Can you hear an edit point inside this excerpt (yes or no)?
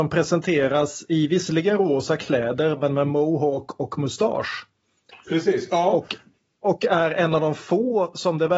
no